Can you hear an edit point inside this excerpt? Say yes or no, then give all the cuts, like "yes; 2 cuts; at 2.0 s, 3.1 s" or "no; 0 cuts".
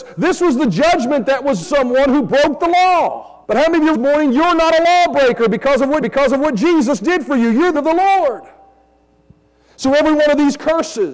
yes; 5 cuts; at 1.6 s, 3.4 s, 3.9 s, 6.0 s, 7.7 s